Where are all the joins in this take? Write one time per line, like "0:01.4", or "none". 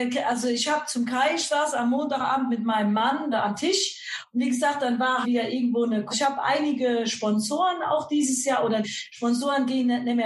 0:03.3
0:05.2
0:06.1
0:08.8

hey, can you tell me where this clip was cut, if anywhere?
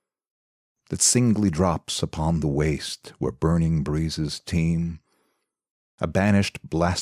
none

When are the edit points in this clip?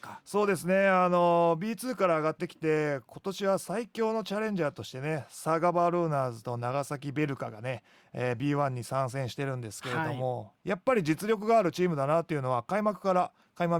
none

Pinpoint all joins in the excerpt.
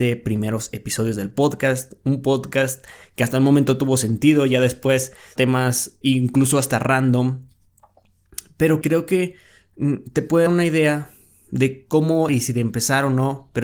0:05.4
0:06.0
0:08.8
0:10.5
0:12.3

